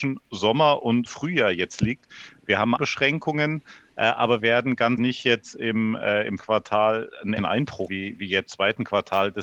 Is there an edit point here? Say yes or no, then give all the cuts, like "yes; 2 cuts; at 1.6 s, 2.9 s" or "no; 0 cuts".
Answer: yes; 8 cuts; at 1.1 s, 2.8 s, 4.4 s, 5.0 s, 6.4 s, 7.4 s, 7.9 s, 8.5 s